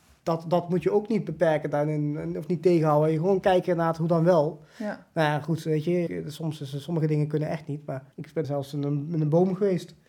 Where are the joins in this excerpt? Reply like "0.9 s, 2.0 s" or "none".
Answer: 6.1 s, 8.1 s, 8.4 s